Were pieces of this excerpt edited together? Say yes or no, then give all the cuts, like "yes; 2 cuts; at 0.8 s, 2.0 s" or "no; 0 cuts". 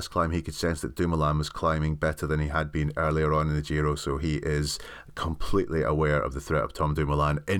no; 0 cuts